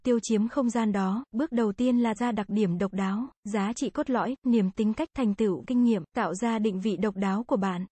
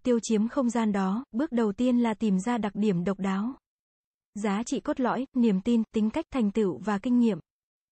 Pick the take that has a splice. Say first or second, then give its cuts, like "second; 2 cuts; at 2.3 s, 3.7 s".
first; 5 cuts; at 2.2 s, 3.4 s, 4.7 s, 5.6 s, 6.1 s